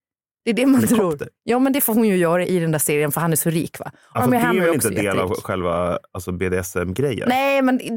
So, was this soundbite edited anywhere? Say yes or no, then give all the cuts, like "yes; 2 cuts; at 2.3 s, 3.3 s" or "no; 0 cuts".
no; 0 cuts